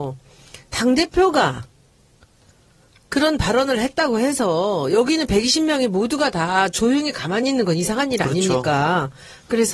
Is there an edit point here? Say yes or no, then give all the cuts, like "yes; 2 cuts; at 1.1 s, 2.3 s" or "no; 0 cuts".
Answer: no; 0 cuts